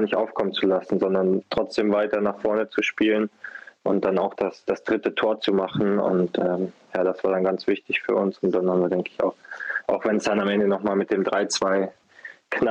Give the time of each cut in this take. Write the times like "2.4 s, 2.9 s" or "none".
none